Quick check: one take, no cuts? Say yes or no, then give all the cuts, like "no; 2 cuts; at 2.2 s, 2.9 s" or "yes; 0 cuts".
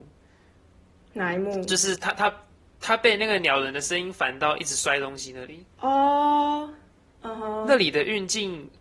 no; 2 cuts; at 2.6 s, 5.7 s